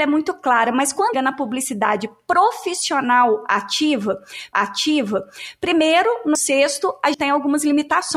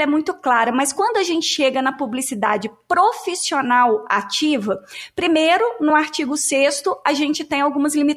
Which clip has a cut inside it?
first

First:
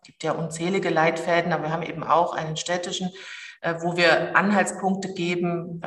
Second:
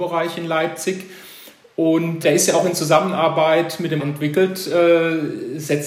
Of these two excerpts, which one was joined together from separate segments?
second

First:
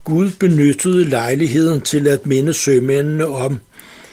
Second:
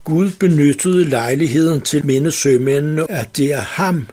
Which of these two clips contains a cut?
second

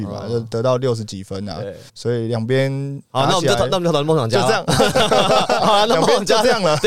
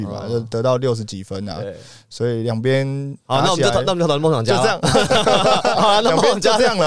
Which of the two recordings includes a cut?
first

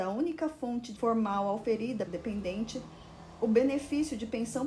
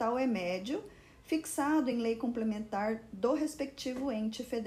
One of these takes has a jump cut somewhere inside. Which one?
first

